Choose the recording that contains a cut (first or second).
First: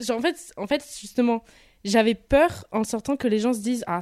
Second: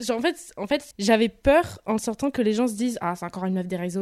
second